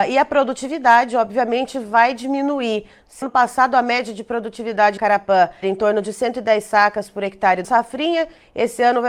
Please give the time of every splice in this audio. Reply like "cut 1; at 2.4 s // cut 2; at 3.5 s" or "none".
cut 1; at 3.2 s // cut 2; at 5.0 s // cut 3; at 5.6 s // cut 4; at 7.6 s